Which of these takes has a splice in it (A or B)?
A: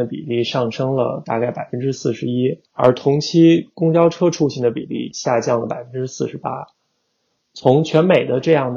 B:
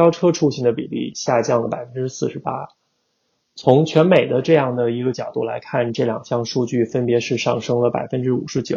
A